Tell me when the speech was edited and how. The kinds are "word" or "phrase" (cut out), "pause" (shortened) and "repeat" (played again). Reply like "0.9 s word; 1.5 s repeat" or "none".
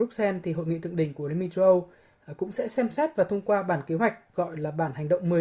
4.3 s word

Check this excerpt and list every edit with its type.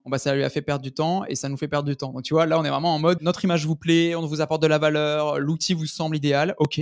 3.2 s word

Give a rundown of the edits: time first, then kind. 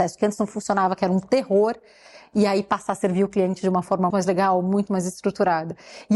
4.1 s word

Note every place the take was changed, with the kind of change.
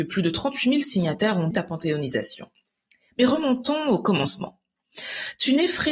1.5 s word

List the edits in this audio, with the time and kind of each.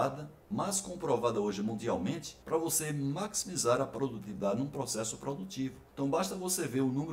2.4 s pause; 5.9 s pause

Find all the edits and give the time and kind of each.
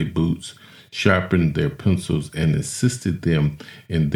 none

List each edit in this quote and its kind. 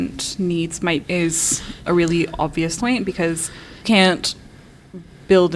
1.0 s word; 1.8 s word; 2.8 s word; 3.8 s word

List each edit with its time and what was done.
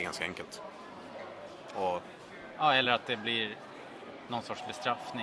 none

